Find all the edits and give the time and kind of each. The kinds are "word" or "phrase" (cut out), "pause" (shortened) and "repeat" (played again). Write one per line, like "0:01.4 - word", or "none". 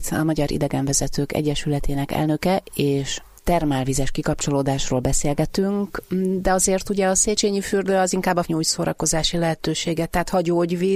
0:08.4 - word